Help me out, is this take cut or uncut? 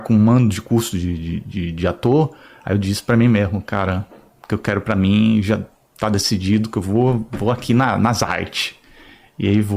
uncut